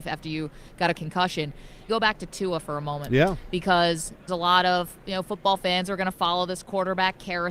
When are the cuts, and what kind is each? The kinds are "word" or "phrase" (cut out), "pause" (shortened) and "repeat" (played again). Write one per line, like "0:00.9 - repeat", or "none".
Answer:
0:00.9 - word
0:01.9 - phrase
0:04.3 - phrase